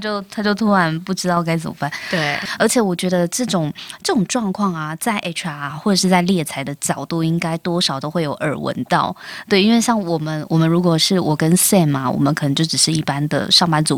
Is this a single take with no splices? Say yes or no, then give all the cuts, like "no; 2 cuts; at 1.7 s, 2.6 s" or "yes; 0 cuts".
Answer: yes; 0 cuts